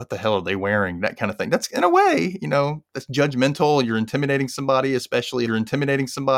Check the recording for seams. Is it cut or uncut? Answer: cut